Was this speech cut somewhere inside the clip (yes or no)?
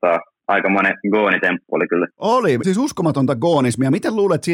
yes